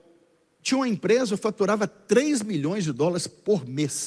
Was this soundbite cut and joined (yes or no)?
no